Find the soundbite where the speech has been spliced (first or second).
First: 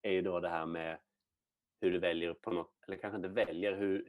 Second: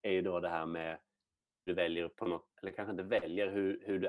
second